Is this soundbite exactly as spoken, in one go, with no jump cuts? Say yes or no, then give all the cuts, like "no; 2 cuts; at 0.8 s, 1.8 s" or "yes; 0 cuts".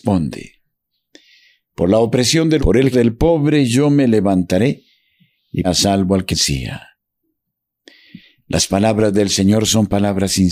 no; 4 cuts; at 2.6 s, 2.9 s, 5.6 s, 6.3 s